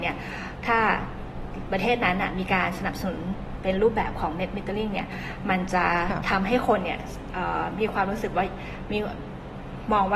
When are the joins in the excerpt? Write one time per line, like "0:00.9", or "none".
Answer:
none